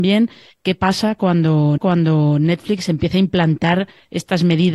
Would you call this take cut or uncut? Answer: cut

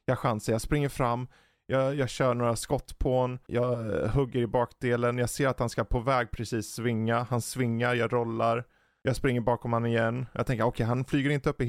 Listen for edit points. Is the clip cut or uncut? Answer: uncut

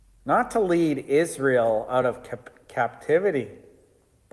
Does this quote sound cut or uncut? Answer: uncut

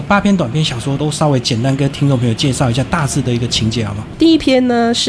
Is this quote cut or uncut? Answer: uncut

